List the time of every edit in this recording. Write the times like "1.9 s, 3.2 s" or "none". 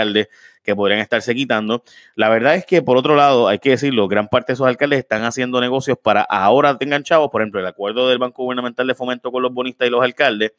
none